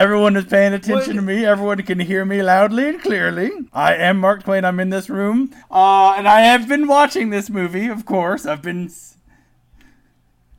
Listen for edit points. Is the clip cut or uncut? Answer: cut